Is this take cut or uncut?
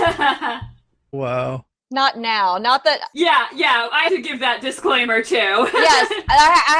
cut